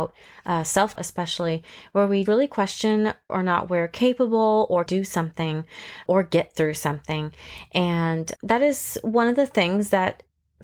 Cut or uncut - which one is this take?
cut